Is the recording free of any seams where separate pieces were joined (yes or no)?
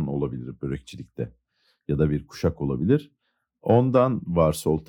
yes